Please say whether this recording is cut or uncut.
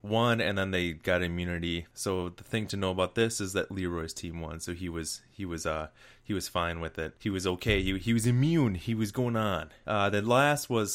uncut